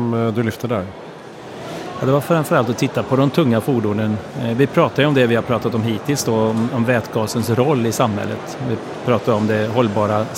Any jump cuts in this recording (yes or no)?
no